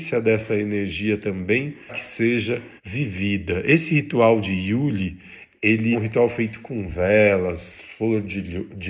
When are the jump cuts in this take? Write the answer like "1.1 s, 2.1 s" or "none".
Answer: 1.9 s, 2.8 s, 5.9 s